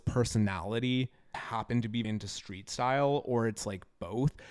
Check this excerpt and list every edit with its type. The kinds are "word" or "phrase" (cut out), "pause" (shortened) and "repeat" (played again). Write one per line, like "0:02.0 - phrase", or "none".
0:01.3 - word
0:02.0 - word